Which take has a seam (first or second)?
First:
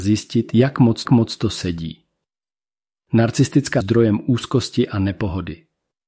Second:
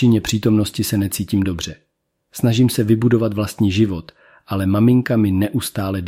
first